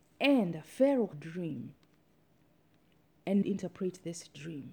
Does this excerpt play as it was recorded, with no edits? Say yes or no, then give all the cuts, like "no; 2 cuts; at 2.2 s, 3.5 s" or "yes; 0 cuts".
no; 2 cuts; at 1.1 s, 3.4 s